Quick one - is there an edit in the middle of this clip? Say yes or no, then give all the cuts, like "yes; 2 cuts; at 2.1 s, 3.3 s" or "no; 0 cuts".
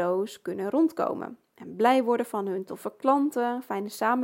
no; 0 cuts